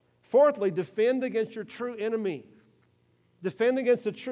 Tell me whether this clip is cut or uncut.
uncut